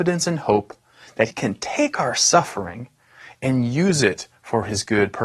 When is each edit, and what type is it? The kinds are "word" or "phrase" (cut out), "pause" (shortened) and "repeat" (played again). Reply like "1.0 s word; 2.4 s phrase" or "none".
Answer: 1.3 s word

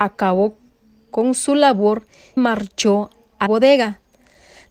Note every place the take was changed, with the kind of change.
2.4 s word; 3.5 s word

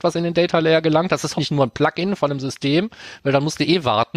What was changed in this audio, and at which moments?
1.4 s word

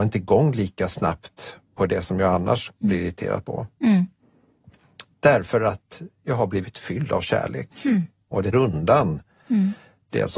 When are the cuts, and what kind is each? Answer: 2.7 s word; 8.5 s word

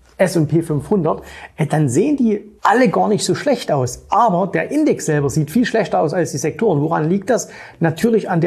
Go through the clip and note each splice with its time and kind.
2.6 s pause

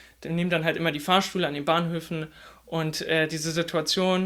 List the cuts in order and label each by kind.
none

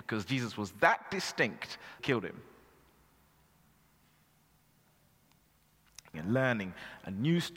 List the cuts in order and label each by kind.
2.0 s word; 6.1 s phrase

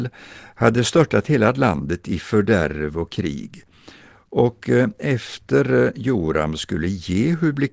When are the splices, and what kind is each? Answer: none

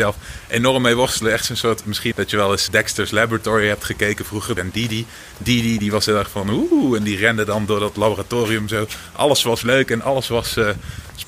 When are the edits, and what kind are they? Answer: 2.1 s word; 2.7 s word; 4.6 s word

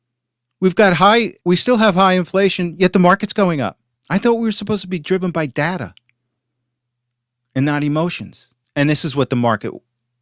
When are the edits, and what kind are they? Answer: none

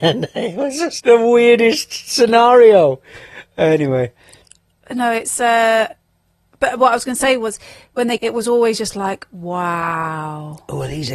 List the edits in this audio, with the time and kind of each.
1.0 s word; 8.2 s word

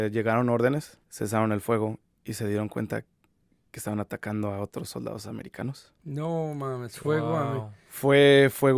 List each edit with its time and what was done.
1.0 s pause

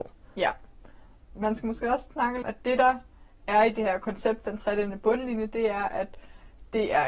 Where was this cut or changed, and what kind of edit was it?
2.4 s phrase

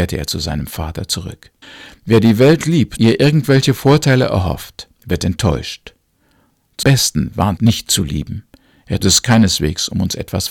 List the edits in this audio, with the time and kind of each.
1.6 s pause; 3.0 s phrase; 4.9 s pause; 6.8 s word; 7.6 s phrase; 9.0 s word

